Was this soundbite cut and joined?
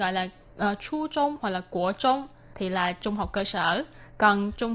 no; 0 cuts

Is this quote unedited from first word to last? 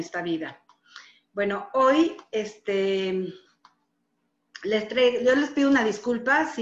yes; 0 cuts

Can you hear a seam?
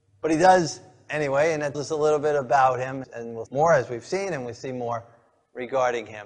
yes; 3 cuts; at 1.7 s, 3.0 s, 3.5 s

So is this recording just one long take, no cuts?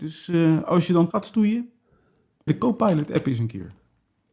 no; 2 cuts; at 1.1 s, 2.5 s

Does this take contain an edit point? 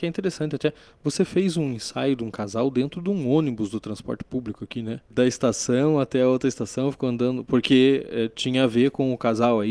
no; 0 cuts

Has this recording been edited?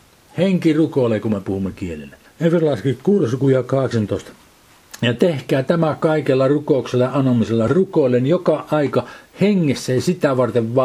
no; 0 cuts

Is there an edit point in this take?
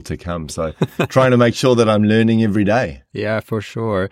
no; 0 cuts

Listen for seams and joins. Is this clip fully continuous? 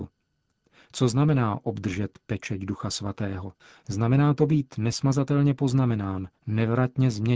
no; 2 cuts; at 3.6 s, 6.4 s

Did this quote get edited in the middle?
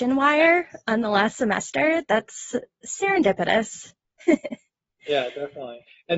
no; 0 cuts

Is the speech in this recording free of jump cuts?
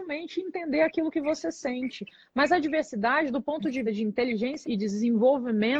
no; 2 cuts; at 3.9 s, 4.6 s

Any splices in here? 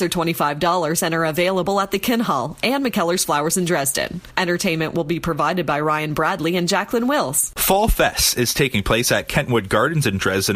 no; 0 cuts

